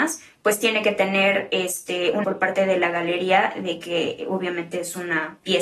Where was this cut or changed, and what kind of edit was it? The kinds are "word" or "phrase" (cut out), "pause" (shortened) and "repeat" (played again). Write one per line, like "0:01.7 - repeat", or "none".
0:02.2 - word